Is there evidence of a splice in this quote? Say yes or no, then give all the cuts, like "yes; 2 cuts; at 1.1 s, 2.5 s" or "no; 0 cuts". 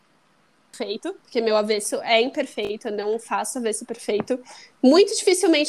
yes; 1 cut; at 1.2 s